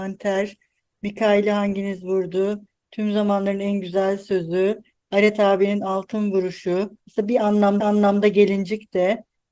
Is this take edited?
yes; 2 cuts; at 7.0 s, 7.8 s

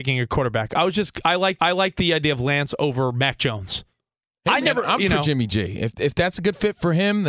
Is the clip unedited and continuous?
no; 4 cuts; at 1.6 s, 4.2 s, 5.0 s, 5.9 s

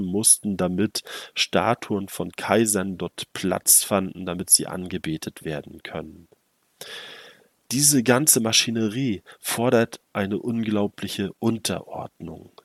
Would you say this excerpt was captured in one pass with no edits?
yes; 0 cuts

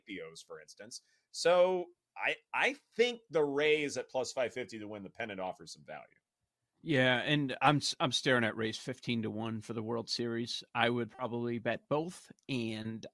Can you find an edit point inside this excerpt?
no; 0 cuts

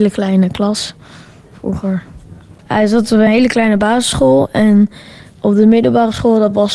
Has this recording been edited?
no; 0 cuts

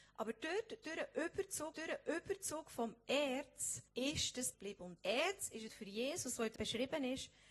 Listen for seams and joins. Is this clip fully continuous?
no; 6 cuts; at 1.7 s, 3.9 s, 4.5 s, 5.0 s, 5.7 s, 6.6 s

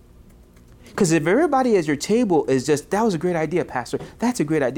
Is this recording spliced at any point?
no; 0 cuts

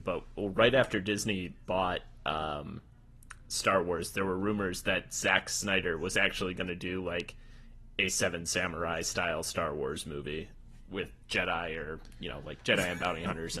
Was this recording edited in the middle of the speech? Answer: yes; 1 cut; at 11.2 s

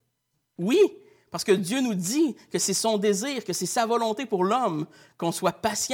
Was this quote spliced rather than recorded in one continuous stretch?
no; 0 cuts

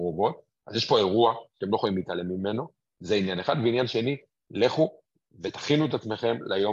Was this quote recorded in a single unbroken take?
yes; 0 cuts

